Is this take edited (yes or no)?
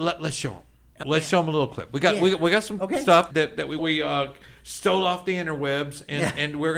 yes